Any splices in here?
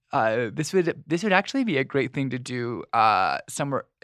no; 0 cuts

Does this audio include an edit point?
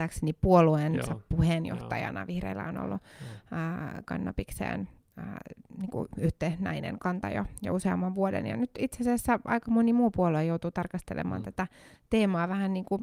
no; 0 cuts

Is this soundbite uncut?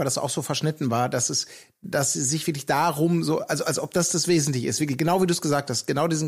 yes; 0 cuts

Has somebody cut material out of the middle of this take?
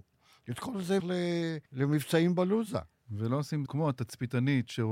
yes; 3 cuts; at 1.0 s, 1.7 s, 3.7 s

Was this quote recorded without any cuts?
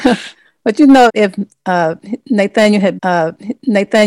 no; 2 cuts; at 1.1 s, 3.0 s

